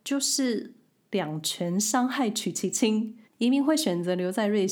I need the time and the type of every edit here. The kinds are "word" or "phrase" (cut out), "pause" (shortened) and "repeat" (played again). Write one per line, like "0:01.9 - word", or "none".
0:03.2 - pause

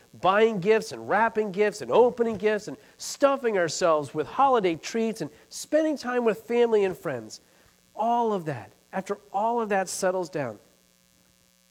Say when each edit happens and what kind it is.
none

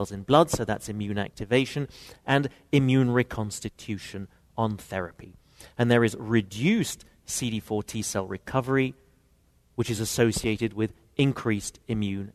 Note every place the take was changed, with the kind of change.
none

